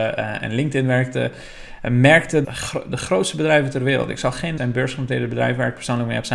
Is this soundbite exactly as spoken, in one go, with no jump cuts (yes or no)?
no